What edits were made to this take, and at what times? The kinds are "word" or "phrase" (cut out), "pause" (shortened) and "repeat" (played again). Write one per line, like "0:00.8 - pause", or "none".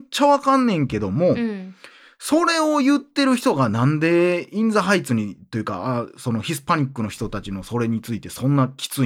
none